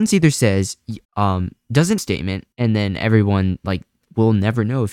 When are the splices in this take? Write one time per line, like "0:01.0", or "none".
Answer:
0:01.0
0:02.0
0:02.5